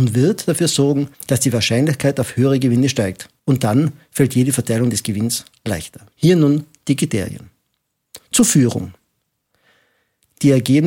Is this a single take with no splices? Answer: no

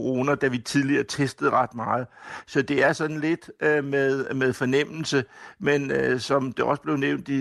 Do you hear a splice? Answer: no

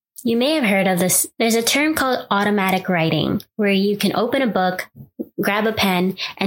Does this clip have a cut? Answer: no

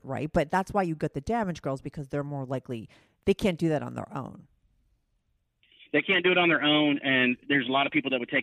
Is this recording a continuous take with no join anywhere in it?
yes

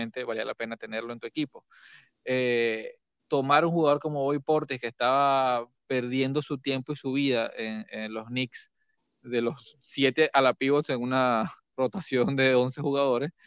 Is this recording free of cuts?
yes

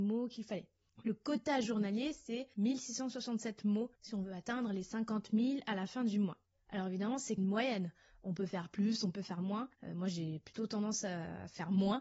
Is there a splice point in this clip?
yes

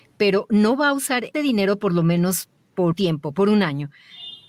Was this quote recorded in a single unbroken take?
no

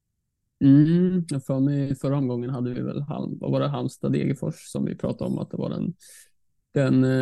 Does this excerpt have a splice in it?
no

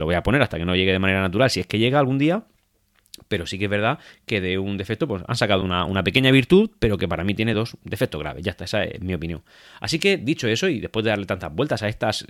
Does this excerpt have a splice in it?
no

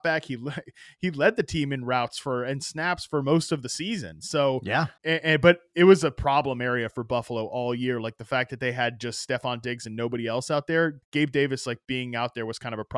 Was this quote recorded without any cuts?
no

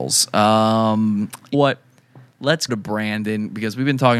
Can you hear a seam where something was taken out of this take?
yes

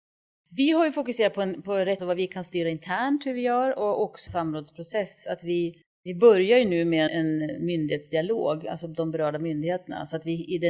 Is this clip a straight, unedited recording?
no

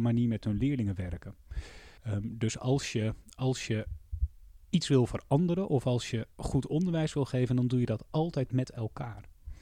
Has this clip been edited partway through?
yes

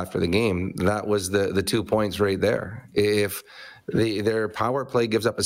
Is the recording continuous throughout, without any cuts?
yes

